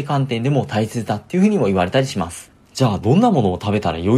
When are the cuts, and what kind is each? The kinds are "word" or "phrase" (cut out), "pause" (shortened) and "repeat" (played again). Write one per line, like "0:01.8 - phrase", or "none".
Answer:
0:02.6 - pause